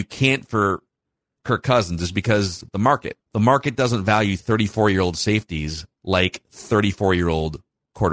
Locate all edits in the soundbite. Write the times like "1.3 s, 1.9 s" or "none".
3.2 s, 5.9 s